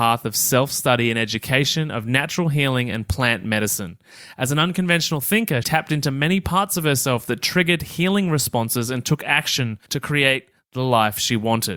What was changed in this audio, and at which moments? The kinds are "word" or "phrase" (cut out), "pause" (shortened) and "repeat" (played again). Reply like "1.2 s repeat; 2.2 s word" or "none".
5.6 s word; 9.8 s pause